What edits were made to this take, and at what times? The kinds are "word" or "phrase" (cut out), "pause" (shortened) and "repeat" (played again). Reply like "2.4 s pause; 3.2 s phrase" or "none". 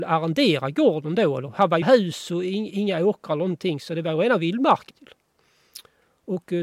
1.8 s word; 4.9 s phrase